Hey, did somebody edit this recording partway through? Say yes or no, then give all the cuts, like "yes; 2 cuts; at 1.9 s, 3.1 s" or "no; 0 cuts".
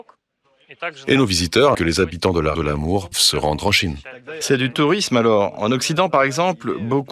yes; 3 cuts; at 1.7 s, 2.5 s, 3.1 s